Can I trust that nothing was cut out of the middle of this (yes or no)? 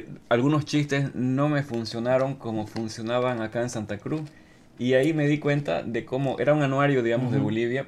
yes